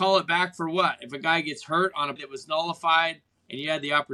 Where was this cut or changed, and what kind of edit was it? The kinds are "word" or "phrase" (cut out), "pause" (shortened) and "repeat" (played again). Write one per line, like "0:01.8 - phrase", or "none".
0:02.2 - word